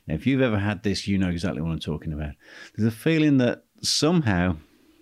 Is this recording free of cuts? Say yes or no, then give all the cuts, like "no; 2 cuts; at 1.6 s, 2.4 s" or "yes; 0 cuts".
no; 1 cut; at 3.8 s